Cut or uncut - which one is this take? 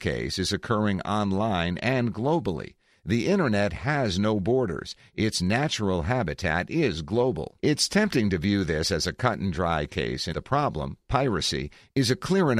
cut